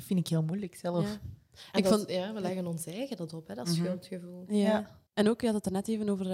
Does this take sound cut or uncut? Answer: cut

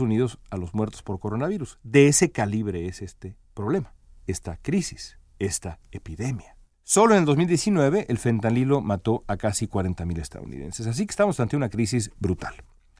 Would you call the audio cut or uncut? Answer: cut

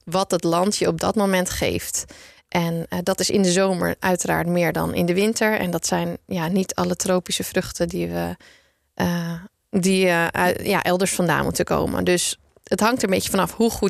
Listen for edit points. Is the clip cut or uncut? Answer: uncut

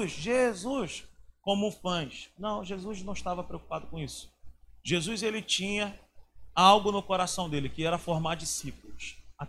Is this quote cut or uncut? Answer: uncut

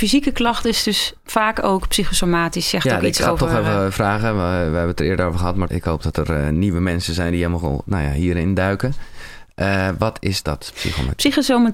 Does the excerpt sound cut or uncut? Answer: cut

